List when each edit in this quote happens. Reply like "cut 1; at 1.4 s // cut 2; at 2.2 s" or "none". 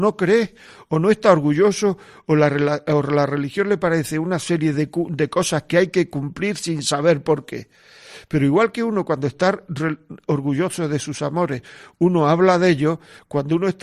none